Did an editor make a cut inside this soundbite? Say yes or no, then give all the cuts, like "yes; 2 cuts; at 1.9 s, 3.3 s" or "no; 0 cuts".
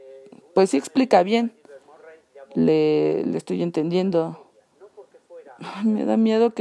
no; 0 cuts